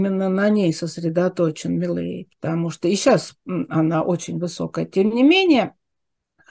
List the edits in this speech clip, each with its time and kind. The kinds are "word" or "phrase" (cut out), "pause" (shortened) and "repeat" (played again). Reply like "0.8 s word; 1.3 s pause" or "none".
none